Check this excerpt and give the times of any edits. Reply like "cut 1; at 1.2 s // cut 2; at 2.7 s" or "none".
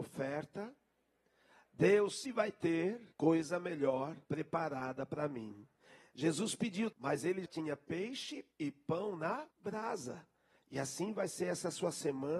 cut 1; at 2.2 s // cut 2; at 3.1 s // cut 3; at 4.2 s // cut 4; at 6.9 s // cut 5; at 7.5 s // cut 6; at 8.5 s // cut 7; at 9.5 s